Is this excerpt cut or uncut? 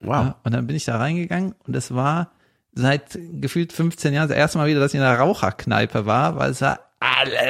uncut